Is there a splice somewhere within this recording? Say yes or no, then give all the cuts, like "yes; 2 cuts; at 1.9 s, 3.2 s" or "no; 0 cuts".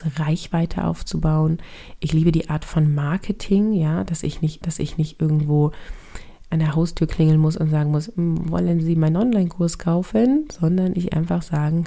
yes; 1 cut; at 4.6 s